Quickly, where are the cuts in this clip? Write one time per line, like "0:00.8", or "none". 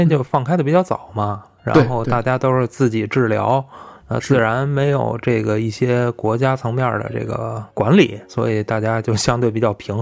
none